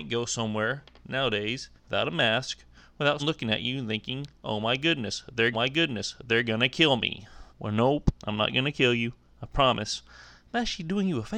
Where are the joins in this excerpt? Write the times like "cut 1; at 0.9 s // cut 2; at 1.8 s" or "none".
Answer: cut 1; at 1.8 s // cut 2; at 3.2 s // cut 3; at 5.5 s // cut 4; at 7.5 s // cut 5; at 8.2 s